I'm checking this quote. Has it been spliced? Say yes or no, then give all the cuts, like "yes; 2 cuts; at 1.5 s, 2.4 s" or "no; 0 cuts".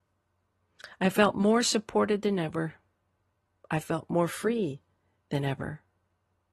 no; 0 cuts